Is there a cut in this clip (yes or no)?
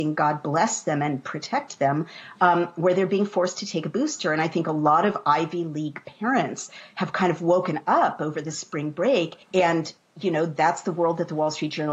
yes